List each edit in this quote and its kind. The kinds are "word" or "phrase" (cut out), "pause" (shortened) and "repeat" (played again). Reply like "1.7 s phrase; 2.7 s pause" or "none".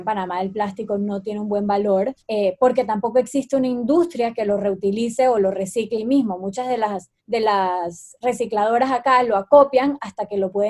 2.2 s pause; 6.0 s word; 7.2 s pause